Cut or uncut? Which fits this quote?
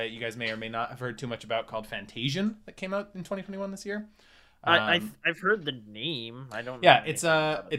uncut